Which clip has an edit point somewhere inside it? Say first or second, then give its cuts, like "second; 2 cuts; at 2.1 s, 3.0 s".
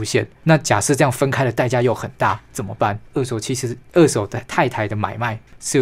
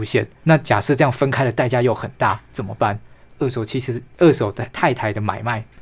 first; 1 cut; at 3.1 s